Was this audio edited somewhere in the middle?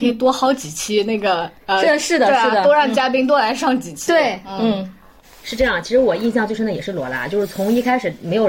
no; 0 cuts

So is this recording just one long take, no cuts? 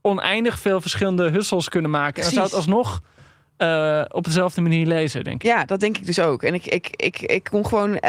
yes; 0 cuts

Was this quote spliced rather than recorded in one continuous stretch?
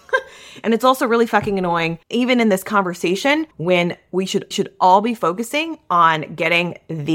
yes; 3 cuts; at 2.0 s, 3.5 s, 4.5 s

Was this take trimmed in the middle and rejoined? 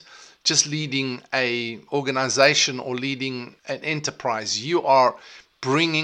yes; 1 cut; at 3.6 s

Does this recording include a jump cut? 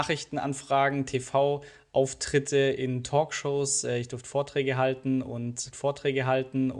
yes; 1 cut; at 5.7 s

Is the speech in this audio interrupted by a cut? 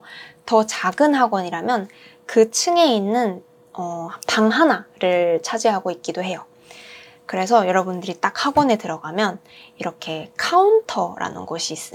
no; 0 cuts

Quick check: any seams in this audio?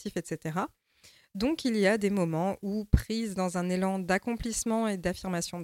no; 0 cuts

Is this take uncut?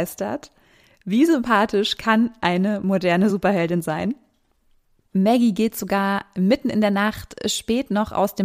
yes; 0 cuts

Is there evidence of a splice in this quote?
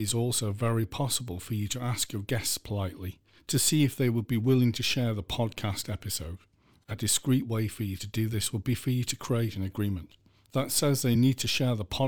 no; 0 cuts

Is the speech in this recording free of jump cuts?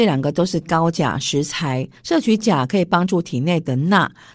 no; 1 cut; at 2.0 s

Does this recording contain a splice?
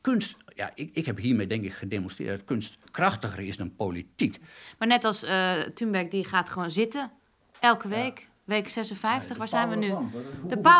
no; 0 cuts

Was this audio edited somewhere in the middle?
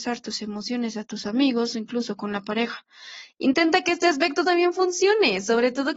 no; 0 cuts

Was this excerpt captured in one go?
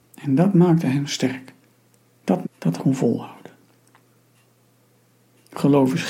no; 2 cuts; at 2.4 s, 2.8 s

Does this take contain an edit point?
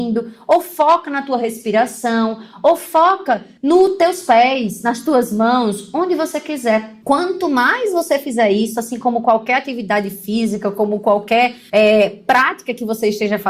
no; 0 cuts

